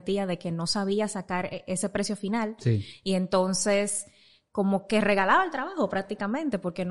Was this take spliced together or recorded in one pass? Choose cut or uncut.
uncut